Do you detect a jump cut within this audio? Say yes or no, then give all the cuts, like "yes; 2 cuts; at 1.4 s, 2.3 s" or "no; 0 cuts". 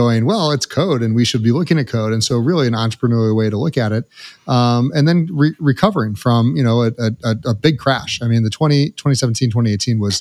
no; 0 cuts